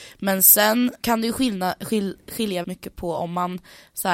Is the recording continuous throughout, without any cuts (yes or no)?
no